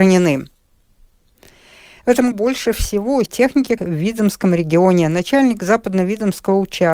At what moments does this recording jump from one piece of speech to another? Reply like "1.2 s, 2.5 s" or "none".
2.3 s, 3.3 s, 3.8 s